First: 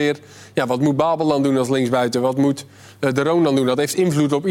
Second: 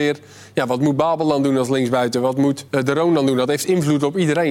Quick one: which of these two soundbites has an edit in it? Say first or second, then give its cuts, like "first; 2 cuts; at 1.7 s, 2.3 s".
second; 1 cut; at 2.7 s